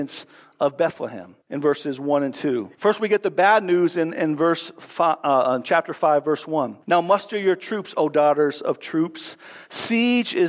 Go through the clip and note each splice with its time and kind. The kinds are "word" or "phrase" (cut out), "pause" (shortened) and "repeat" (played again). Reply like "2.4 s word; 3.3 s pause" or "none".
1.4 s pause; 2.7 s pause; 6.8 s pause